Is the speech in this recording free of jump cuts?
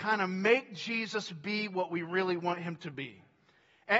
yes; 0 cuts

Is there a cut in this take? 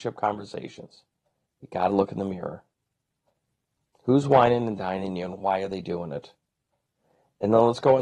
no; 0 cuts

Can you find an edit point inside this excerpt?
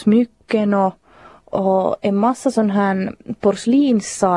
no; 0 cuts

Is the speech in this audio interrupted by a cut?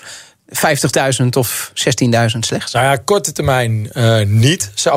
no; 0 cuts

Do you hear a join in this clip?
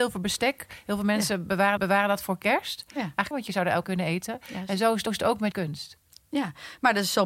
yes; 5 cuts; at 1.8 s, 3.3 s, 3.8 s, 5.1 s, 5.5 s

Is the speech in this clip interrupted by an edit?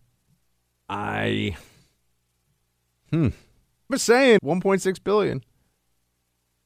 yes; 2 cuts; at 3.9 s, 4.4 s

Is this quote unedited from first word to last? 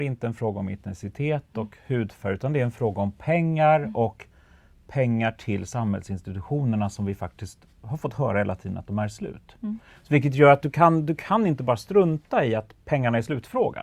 yes; 0 cuts

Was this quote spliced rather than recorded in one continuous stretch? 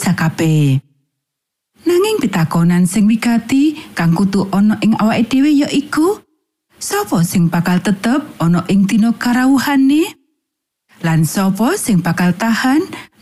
no; 0 cuts

